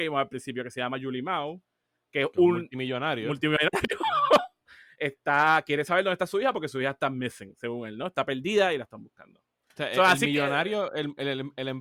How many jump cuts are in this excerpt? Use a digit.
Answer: 0